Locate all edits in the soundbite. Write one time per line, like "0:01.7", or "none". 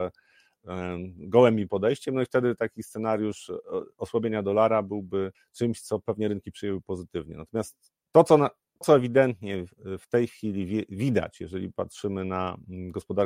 0:05.3
0:08.8